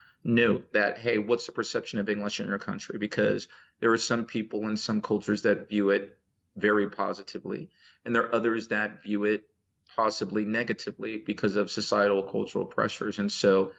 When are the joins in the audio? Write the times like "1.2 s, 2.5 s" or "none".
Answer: none